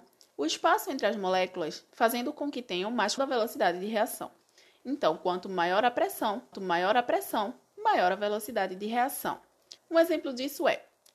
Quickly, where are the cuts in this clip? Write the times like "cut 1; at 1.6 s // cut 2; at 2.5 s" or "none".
cut 1; at 1.9 s // cut 2; at 3.2 s // cut 3; at 6.5 s // cut 4; at 9.8 s